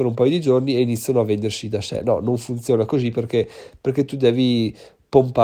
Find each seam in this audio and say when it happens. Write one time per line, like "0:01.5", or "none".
none